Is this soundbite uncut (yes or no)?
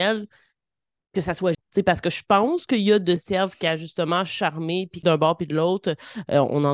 no